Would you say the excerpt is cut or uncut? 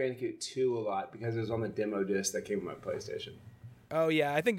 uncut